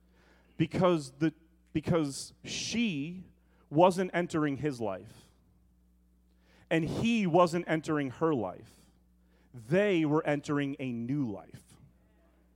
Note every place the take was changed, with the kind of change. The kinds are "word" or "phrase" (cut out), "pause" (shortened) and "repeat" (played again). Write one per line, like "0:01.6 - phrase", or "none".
none